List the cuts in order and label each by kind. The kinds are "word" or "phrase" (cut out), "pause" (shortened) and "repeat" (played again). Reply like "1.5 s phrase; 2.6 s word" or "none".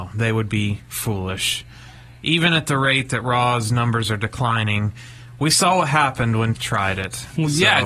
6.5 s word